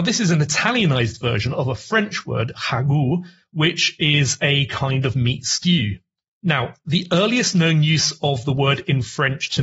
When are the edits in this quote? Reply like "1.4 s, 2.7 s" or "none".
none